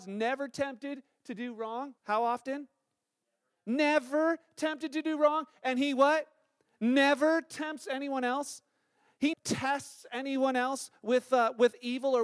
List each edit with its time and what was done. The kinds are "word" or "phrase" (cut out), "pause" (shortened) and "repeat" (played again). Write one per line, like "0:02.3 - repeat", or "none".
0:02.0 - pause
0:09.3 - word